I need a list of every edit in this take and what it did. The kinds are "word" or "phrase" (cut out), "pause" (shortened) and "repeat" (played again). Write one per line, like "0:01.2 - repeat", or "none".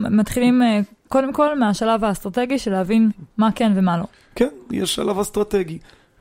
none